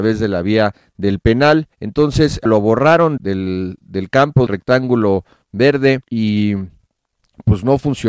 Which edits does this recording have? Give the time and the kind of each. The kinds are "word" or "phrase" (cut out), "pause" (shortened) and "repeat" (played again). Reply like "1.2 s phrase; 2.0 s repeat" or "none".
1.7 s pause; 2.5 s word; 3.2 s word; 4.5 s word; 6.0 s pause